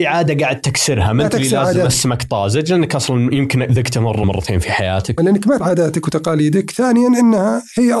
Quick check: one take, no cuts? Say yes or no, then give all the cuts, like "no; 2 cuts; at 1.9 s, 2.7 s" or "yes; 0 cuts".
no; 3 cuts; at 4.2 s, 5.2 s, 5.6 s